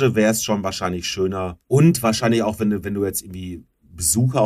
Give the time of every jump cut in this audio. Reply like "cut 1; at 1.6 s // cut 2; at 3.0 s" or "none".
cut 1; at 1.6 s